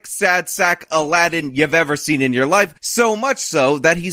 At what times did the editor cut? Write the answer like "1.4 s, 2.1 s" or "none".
2.8 s